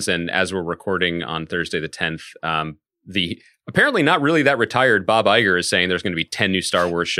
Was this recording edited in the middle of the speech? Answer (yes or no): no